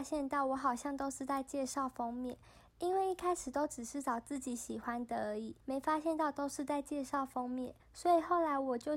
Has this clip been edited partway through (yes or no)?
yes